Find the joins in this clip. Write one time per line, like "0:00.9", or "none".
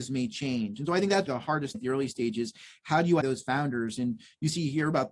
0:01.3
0:01.7
0:03.2